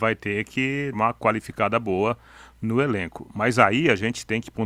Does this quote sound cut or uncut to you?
cut